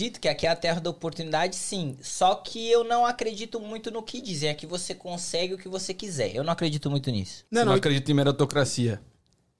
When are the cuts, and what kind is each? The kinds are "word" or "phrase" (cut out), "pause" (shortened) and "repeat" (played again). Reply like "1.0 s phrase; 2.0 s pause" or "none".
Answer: 7.5 s pause